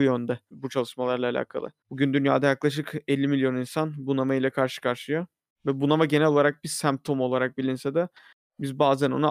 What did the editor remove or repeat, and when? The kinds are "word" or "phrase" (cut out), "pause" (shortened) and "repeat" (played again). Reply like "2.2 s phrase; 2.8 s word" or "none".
none